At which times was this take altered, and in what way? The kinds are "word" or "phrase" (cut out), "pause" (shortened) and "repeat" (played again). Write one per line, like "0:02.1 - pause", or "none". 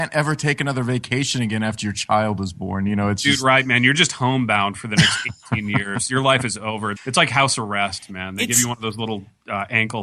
0:07.0 - word

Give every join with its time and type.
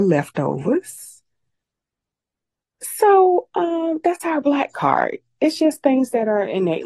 none

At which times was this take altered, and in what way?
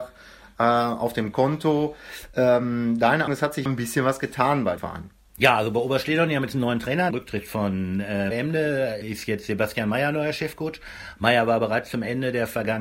0:03.3 - word
0:03.7 - word
0:04.8 - word
0:07.1 - phrase
0:08.3 - word
0:09.0 - word

